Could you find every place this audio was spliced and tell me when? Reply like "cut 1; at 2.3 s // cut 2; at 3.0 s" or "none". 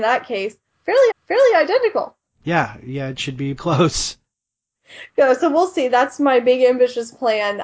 cut 1; at 1.1 s // cut 2; at 3.6 s // cut 3; at 5.1 s